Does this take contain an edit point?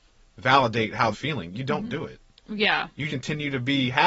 yes; 2 cuts; at 1.1 s, 3.1 s

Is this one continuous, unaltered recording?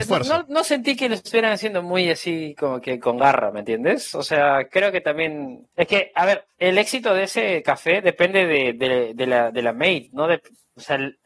no; 2 cuts; at 5.7 s, 6.5 s

